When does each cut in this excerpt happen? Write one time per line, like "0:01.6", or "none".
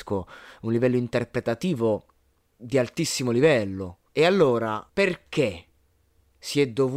0:02.2
0:04.1
0:04.9